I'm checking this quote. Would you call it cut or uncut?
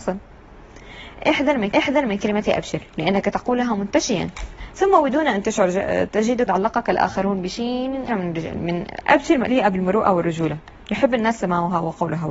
cut